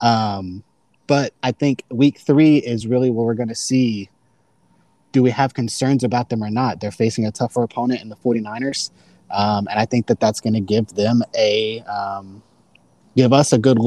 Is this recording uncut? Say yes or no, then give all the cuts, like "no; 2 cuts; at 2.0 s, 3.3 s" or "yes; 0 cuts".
yes; 0 cuts